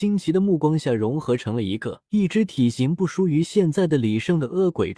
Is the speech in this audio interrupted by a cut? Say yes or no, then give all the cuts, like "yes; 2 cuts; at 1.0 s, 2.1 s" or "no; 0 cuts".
yes; 1 cut; at 2.0 s